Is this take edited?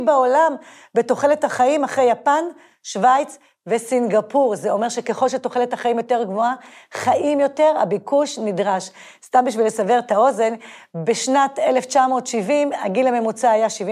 no; 0 cuts

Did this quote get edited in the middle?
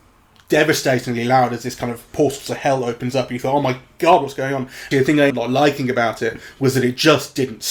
yes; 2 cuts; at 4.9 s, 5.3 s

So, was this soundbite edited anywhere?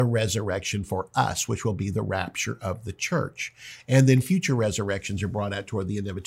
no; 0 cuts

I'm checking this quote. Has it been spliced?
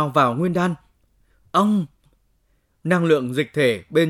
yes; 1 cut; at 2.0 s

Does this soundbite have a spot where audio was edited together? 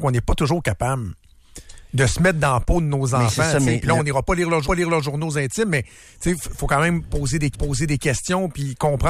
yes; 2 cuts; at 4.6 s, 7.5 s

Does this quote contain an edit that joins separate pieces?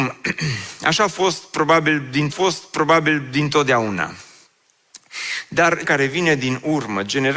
yes; 2 cuts; at 2.3 s, 5.8 s

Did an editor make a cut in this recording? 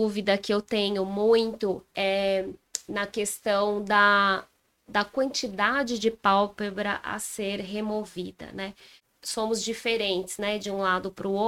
no; 0 cuts

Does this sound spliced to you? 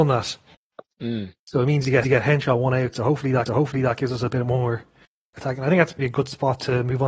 yes; 4 cuts; at 1.4 s, 2.0 s, 3.5 s, 6.0 s

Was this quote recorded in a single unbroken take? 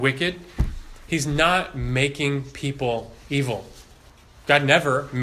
yes; 0 cuts

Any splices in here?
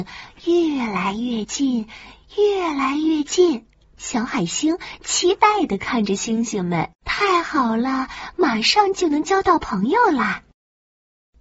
yes; 2 cuts; at 3.8 s, 7.0 s

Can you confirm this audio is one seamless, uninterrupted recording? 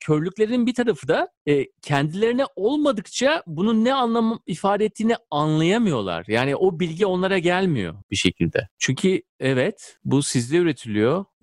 yes; 0 cuts

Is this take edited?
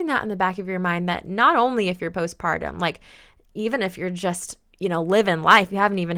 no; 0 cuts

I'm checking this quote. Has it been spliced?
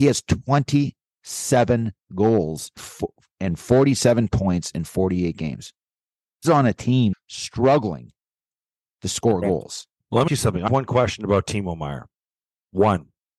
yes; 5 cuts; at 2.8 s, 6.4 s, 7.1 s, 10.3 s, 10.7 s

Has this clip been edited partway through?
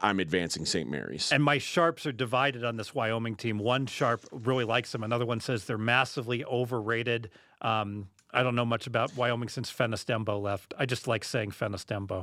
yes; 1 cut; at 8.2 s

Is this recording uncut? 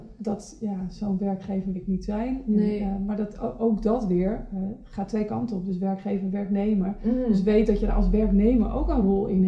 no; 1 cut; at 1.7 s

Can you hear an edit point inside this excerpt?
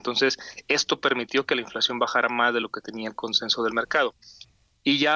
no; 0 cuts

